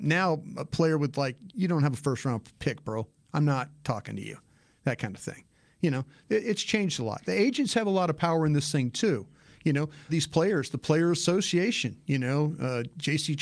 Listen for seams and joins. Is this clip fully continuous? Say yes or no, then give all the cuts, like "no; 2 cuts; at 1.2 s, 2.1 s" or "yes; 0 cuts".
no; 1 cut; at 10.1 s